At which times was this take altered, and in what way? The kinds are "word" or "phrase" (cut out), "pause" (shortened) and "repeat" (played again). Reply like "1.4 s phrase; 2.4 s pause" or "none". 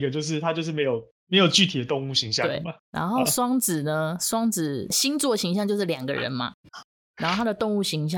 2.8 s pause